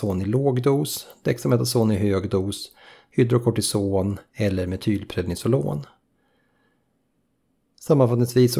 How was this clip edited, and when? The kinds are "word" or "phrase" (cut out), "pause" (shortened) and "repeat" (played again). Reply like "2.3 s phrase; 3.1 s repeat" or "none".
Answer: none